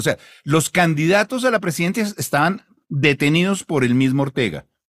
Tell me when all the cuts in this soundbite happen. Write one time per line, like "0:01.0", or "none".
none